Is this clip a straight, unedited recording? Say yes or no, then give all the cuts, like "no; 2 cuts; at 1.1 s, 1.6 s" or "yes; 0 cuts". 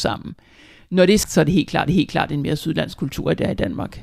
no; 2 cuts; at 1.2 s, 1.9 s